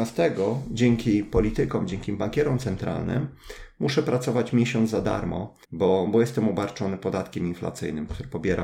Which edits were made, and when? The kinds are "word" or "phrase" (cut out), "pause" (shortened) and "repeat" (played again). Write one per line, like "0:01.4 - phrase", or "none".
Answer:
0:05.6 - pause